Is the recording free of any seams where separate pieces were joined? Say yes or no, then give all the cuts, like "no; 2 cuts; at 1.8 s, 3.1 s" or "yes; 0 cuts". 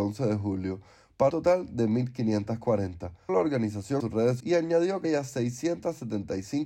no; 5 cuts; at 1.3 s, 3.3 s, 4.0 s, 4.4 s, 5.0 s